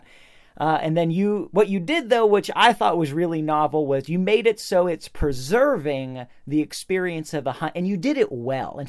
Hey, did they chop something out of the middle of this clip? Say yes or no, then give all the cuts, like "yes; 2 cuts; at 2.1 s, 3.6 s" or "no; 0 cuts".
no; 0 cuts